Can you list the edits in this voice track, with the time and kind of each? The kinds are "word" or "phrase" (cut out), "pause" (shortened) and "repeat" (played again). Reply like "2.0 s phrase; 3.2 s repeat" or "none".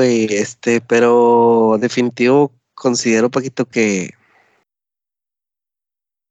none